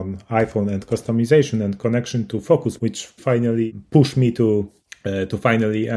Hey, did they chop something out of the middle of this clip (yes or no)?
yes